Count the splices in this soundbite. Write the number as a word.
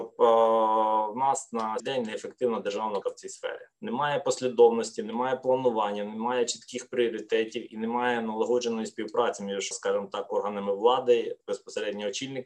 five